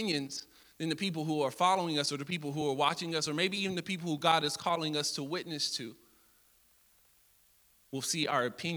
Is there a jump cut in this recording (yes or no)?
no